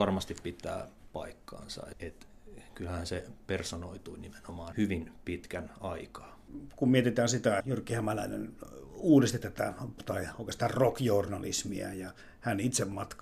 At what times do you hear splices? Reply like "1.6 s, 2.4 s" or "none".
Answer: 1.9 s, 4.7 s, 7.6 s, 10.0 s